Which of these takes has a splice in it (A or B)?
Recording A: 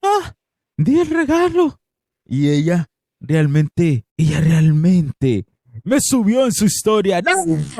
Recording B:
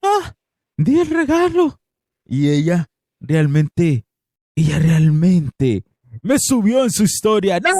A